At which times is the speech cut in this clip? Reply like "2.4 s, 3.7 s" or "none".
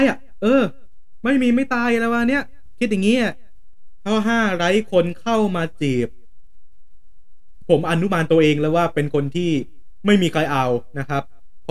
7.6 s